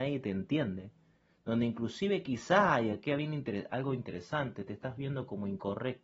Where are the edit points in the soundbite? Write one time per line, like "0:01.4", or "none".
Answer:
none